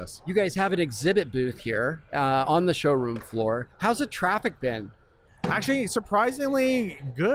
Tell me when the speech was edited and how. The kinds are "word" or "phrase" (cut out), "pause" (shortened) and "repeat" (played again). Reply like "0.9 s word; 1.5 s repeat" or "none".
none

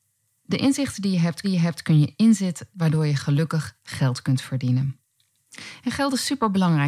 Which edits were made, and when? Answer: 1.4 s repeat; 2.7 s word

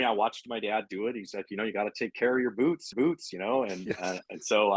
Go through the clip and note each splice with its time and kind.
2.9 s repeat

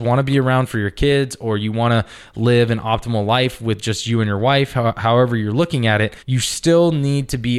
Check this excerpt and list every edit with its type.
6.2 s pause

